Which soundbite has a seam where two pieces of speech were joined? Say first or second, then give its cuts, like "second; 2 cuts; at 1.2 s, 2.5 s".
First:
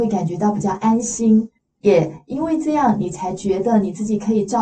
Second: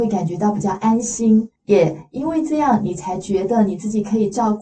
second; 1 cut; at 1.6 s